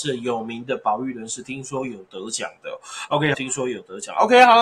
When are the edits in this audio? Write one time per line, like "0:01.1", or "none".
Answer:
0:03.3